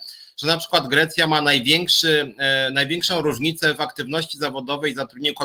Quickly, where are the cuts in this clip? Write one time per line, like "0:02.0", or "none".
none